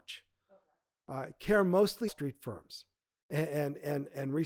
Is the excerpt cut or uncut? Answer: cut